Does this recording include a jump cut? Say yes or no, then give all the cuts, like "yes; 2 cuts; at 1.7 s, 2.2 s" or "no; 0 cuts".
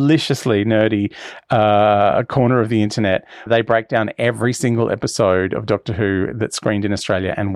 yes; 1 cut; at 3.5 s